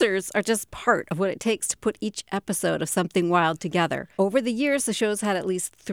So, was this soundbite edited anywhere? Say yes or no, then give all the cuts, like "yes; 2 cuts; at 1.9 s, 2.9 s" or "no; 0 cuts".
no; 0 cuts